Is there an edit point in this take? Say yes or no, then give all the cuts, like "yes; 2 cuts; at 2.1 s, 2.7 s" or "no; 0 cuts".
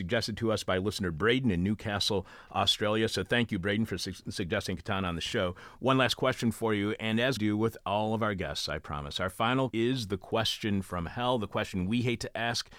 yes; 2 cuts; at 7.4 s, 9.7 s